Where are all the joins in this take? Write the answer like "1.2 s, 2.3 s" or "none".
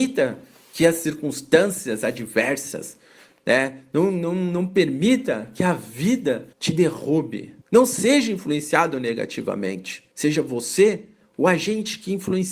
6.5 s, 7.6 s, 10.1 s